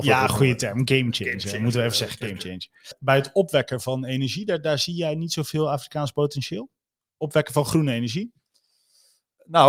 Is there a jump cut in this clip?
no; 0 cuts

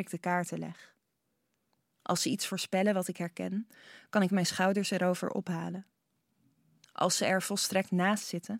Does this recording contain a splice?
no; 0 cuts

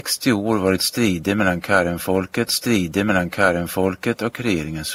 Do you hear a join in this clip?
yes; 1 cut; at 2.5 s

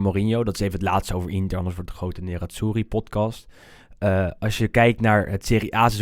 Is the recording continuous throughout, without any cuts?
yes; 0 cuts

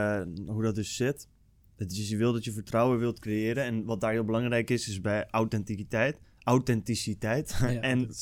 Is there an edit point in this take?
yes; 1 cut; at 6.2 s

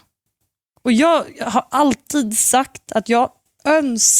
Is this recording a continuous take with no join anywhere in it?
yes; 0 cuts

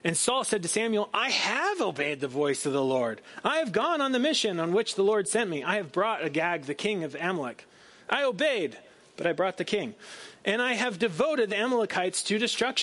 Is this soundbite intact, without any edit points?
yes; 0 cuts

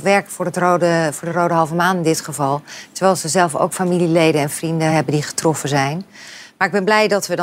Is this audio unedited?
yes; 0 cuts

